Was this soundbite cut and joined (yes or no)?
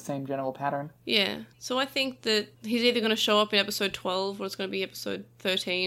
no